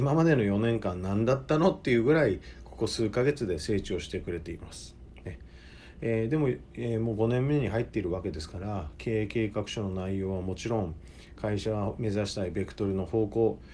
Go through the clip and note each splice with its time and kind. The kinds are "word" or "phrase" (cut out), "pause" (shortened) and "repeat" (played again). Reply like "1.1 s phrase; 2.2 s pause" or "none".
none